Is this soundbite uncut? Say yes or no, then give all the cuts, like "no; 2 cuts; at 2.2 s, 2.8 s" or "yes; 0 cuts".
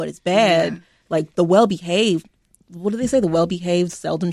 yes; 0 cuts